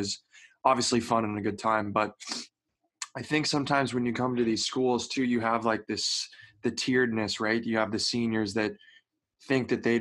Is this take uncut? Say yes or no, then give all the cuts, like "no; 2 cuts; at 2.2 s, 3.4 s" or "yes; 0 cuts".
yes; 0 cuts